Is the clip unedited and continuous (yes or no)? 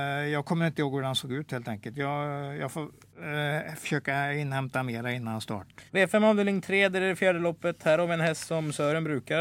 no